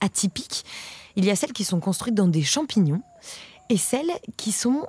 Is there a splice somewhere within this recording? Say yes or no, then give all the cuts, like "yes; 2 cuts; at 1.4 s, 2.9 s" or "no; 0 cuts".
no; 0 cuts